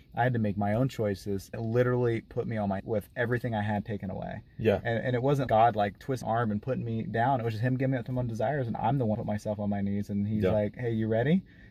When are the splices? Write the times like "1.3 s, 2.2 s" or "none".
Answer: 1.5 s, 2.8 s, 5.0 s, 5.5 s, 6.2 s, 9.1 s

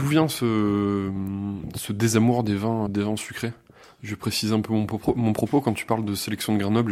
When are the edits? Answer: 2.9 s

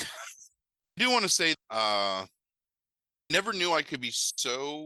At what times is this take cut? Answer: 1.0 s, 1.5 s, 3.3 s

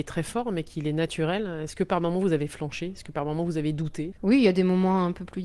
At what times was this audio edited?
none

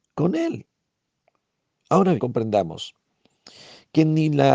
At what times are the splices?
2.2 s

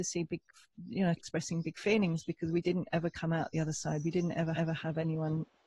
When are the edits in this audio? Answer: 1.2 s, 4.5 s

